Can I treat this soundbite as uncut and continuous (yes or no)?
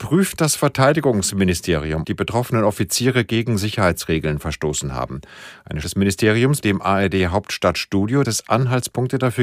no